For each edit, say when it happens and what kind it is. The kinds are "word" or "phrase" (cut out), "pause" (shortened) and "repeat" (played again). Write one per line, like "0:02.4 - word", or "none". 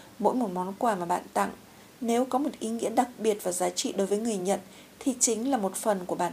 none